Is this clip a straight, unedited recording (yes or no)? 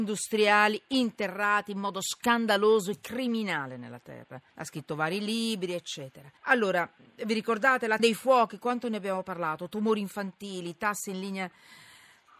no